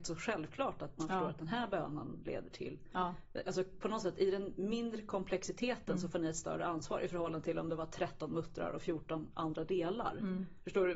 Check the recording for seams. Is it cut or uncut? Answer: uncut